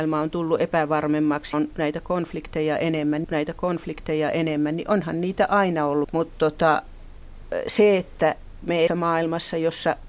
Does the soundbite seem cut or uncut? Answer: cut